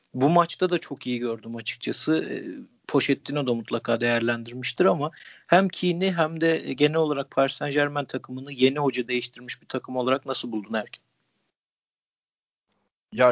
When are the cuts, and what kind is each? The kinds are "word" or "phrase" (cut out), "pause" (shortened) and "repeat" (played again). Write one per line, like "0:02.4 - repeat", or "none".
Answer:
none